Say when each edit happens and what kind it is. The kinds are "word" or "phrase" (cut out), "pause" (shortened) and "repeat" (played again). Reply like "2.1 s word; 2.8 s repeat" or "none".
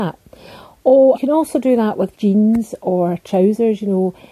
1.1 s word; 2.1 s word